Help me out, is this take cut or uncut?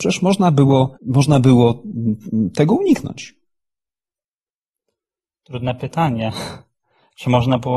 cut